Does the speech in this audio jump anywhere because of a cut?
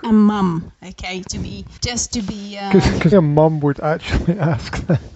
yes; 3 cuts; at 1.3 s, 1.8 s, 3.1 s

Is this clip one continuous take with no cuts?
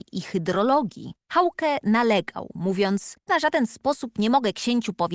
no; 2 cuts; at 1.2 s, 3.3 s

